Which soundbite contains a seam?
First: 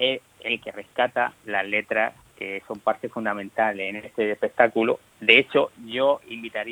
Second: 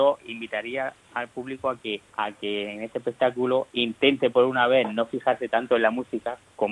second; 1 cut; at 2.1 s

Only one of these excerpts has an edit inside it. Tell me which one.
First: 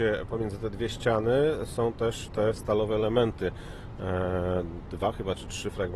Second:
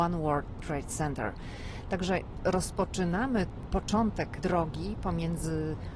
second; 2 cuts; at 2.4 s, 4.4 s

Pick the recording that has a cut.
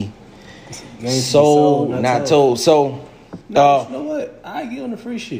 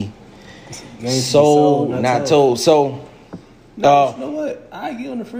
first; 1 cut; at 3.4 s

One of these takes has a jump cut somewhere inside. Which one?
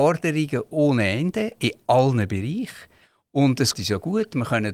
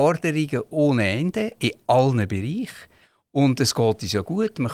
first; 1 cut; at 3.7 s

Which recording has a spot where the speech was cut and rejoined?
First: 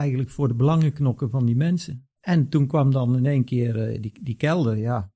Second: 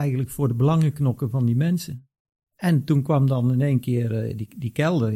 first; 1 cut; at 2.1 s

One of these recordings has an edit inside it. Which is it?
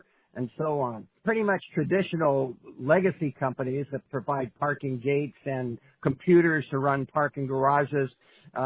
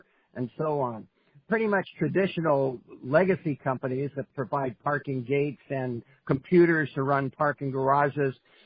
first; 1 cut; at 1.2 s

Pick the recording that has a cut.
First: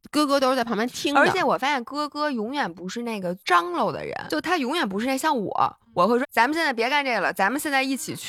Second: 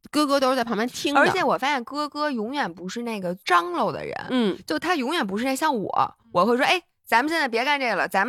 first; 2 cuts; at 4.3 s, 6.2 s

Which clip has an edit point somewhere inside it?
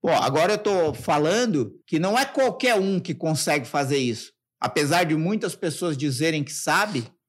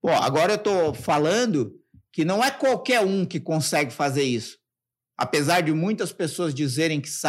first; 2 cuts; at 1.8 s, 4.5 s

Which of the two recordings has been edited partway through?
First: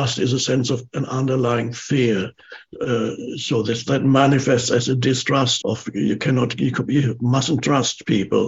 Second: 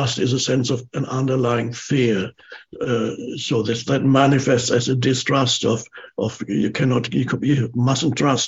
first; 1 cut; at 5.6 s

